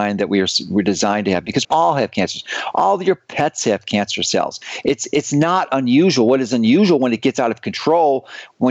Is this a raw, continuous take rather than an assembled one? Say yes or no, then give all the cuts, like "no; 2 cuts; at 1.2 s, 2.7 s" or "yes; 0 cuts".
no; 1 cut; at 1.6 s